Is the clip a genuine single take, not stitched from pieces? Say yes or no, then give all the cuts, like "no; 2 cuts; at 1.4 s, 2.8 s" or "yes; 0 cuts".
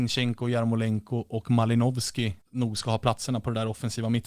no; 1 cut; at 2.4 s